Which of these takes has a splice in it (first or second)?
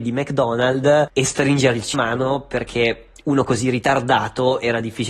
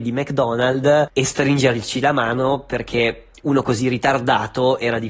first